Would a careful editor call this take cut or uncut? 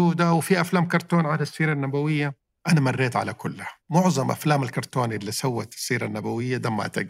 cut